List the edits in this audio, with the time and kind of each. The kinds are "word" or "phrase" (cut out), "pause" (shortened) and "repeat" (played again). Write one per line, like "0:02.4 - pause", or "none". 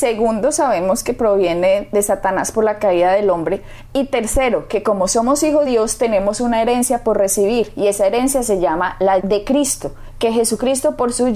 0:05.7 - word
0:09.2 - word